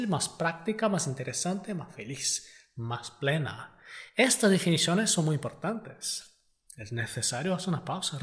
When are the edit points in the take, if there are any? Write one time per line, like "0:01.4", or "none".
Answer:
none